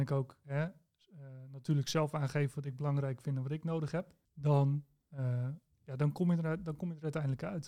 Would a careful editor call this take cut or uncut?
cut